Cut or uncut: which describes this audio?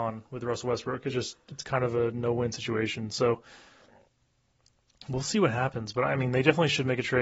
uncut